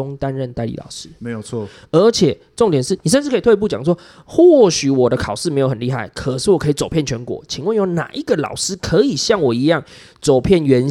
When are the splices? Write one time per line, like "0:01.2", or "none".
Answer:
none